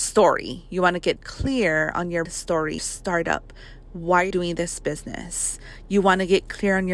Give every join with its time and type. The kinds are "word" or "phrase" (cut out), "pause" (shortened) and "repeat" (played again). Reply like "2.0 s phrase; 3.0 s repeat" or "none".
1.2 s word; 2.3 s word; 2.8 s word; 4.3 s word